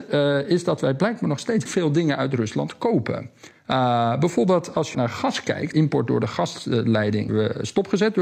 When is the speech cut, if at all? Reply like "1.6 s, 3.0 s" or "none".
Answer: 1.7 s, 4.9 s, 5.7 s, 7.3 s